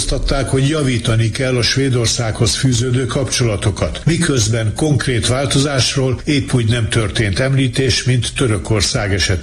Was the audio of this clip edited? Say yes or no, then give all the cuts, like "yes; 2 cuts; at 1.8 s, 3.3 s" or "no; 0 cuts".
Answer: no; 0 cuts